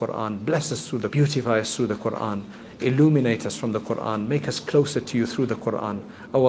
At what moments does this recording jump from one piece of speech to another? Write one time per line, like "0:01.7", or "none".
0:01.1